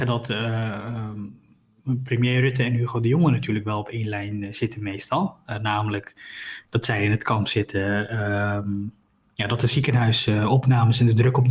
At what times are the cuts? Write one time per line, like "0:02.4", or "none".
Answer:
none